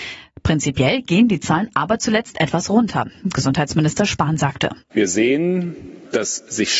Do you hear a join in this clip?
yes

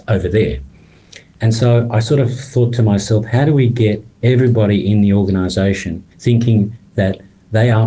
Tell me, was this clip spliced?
yes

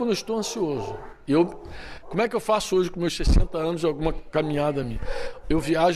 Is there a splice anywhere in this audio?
no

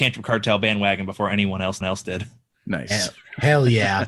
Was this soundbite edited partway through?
yes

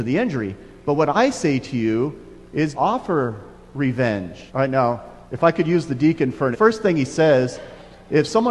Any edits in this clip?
yes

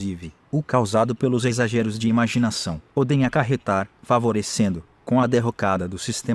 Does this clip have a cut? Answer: yes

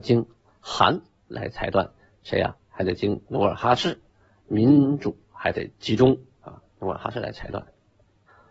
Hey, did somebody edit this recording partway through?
no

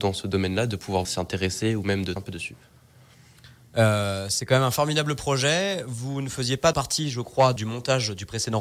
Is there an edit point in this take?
yes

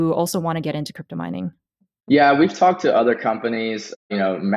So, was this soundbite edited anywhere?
no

